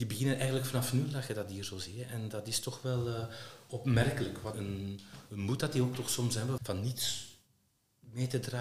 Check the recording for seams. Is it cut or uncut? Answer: cut